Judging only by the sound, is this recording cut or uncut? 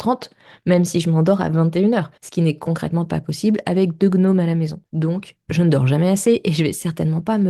cut